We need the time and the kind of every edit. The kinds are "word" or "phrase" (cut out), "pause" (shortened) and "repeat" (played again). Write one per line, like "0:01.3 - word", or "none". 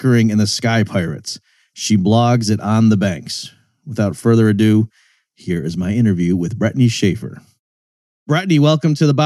none